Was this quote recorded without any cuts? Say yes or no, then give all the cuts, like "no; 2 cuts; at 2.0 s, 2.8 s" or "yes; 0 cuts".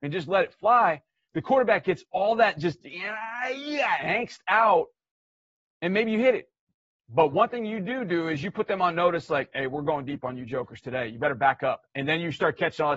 yes; 0 cuts